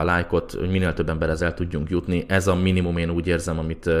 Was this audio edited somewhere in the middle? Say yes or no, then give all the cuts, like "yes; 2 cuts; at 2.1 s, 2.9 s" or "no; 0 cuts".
no; 0 cuts